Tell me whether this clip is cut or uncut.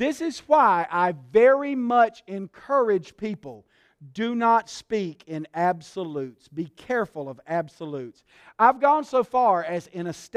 uncut